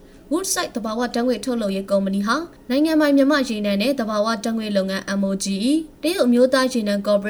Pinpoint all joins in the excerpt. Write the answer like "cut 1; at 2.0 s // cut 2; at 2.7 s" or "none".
cut 1; at 5.9 s